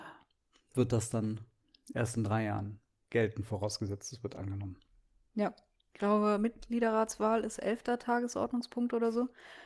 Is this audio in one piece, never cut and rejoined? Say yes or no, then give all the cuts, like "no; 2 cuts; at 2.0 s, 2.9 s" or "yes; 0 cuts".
yes; 0 cuts